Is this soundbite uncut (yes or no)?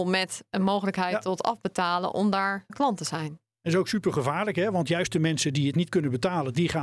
no